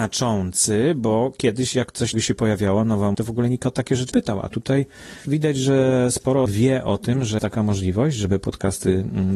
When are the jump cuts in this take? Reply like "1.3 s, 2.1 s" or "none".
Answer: 2.1 s, 3.1 s, 4.1 s, 5.2 s, 6.5 s, 7.4 s